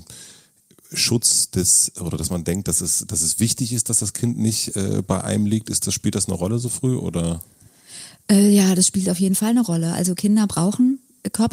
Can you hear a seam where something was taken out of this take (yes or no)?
no